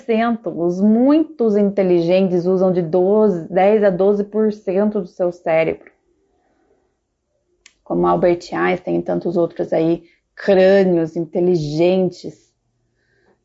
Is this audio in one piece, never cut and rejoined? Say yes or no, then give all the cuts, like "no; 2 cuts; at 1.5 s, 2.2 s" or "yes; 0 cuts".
yes; 0 cuts